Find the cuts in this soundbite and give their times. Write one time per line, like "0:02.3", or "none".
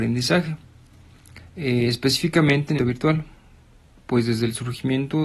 0:01.5
0:02.8